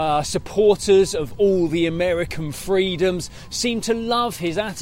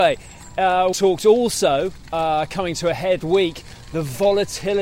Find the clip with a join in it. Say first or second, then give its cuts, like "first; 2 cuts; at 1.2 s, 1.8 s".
second; 2 cuts; at 0.9 s, 3.2 s